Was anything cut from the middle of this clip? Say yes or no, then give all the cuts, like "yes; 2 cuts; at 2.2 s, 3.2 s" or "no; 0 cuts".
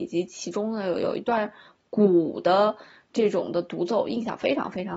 no; 0 cuts